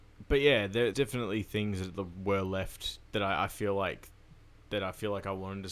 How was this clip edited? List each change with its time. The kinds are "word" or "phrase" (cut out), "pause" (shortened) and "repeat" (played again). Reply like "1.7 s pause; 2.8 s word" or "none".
0.9 s phrase